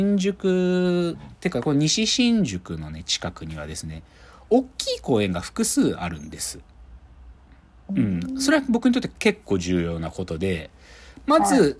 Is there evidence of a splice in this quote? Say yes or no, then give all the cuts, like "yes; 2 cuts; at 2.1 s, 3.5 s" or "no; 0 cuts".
no; 0 cuts